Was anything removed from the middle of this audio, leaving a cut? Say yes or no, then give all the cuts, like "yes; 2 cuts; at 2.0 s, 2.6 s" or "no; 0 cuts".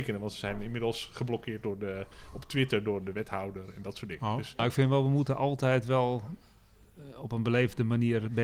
no; 0 cuts